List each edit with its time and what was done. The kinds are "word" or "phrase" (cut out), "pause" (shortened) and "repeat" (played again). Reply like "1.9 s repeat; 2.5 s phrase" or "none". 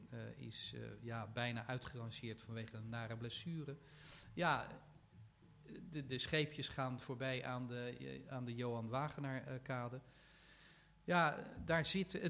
none